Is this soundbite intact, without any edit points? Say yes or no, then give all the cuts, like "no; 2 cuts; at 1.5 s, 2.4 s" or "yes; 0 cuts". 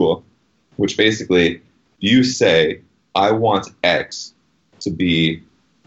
yes; 0 cuts